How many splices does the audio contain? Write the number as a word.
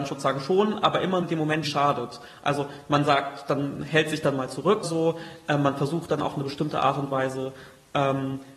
three